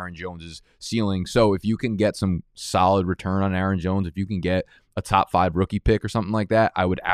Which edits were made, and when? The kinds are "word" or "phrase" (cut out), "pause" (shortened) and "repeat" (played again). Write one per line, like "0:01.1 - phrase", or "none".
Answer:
none